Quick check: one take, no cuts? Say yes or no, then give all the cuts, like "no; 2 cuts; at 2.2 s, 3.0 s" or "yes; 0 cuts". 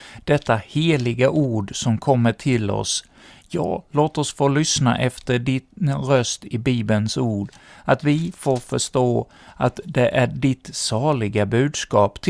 yes; 0 cuts